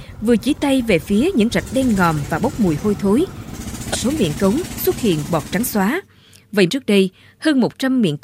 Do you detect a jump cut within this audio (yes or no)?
yes